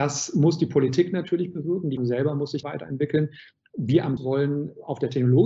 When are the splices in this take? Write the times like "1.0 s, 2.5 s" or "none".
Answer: 2.0 s, 2.6 s, 4.2 s